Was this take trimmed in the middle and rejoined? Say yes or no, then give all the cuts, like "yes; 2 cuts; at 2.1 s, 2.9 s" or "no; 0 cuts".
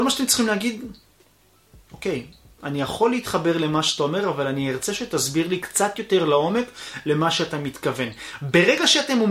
no; 0 cuts